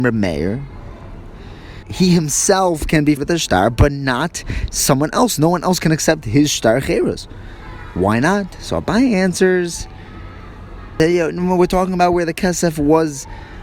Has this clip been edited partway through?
yes; 2 cuts; at 1.8 s, 3.2 s

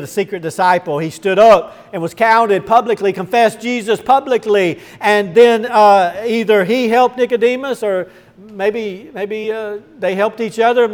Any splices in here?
no; 0 cuts

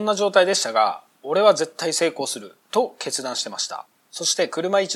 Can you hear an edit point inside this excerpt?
no; 0 cuts

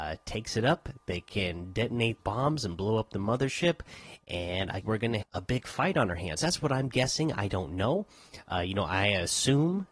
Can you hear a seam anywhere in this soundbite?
yes; 3 cuts; at 2.2 s, 4.8 s, 5.2 s

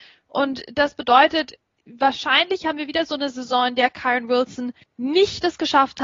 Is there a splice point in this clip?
yes; 1 cut; at 4.8 s

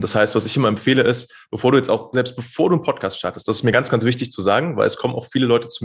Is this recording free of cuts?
yes; 0 cuts

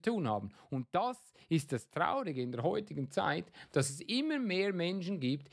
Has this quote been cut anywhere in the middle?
no; 0 cuts

